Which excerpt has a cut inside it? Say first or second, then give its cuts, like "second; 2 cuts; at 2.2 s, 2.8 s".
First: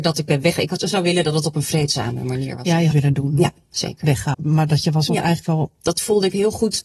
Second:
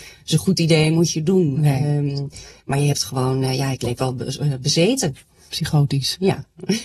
first; 3 cuts; at 2.9 s, 4.3 s, 5.1 s